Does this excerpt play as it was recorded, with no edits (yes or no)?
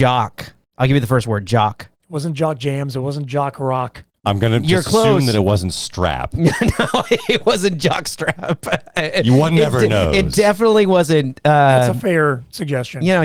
no